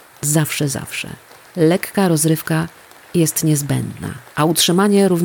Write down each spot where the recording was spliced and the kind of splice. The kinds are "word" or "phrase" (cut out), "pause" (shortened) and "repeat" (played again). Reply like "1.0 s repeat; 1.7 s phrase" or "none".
none

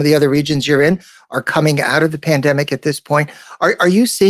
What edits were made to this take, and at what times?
none

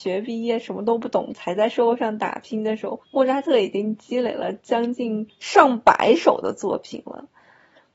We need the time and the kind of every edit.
3.0 s pause; 5.3 s pause

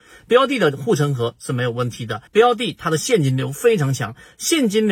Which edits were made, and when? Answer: 2.3 s pause

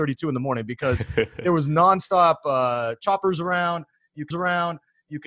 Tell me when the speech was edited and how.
4.3 s repeat

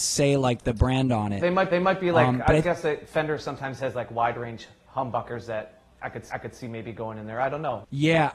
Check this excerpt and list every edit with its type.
1.7 s repeat; 5.9 s pause; 6.3 s repeat

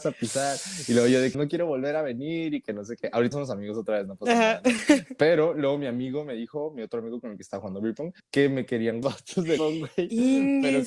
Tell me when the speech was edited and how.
1.3 s word; 3.3 s word; 8.2 s pause; 9.0 s phrase; 9.6 s word

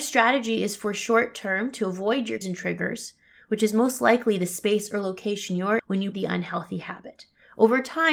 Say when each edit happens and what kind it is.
2.4 s word; 5.8 s word; 6.1 s word

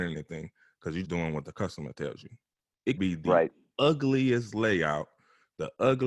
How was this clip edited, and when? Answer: 1.0 s word; 3.0 s word

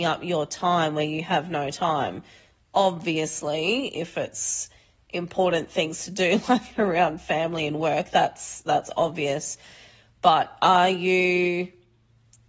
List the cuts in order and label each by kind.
none

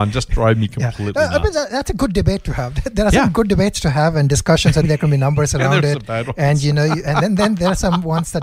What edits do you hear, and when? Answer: 4.8 s word

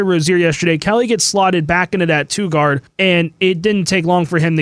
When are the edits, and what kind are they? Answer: none

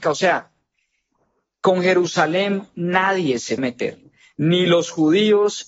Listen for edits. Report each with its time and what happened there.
3.6 s word

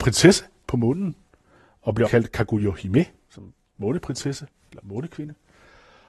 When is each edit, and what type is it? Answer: 2.1 s word

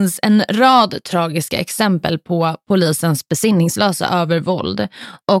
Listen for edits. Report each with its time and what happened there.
none

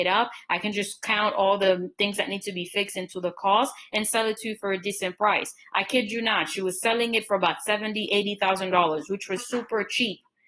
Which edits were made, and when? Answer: 9.4 s word

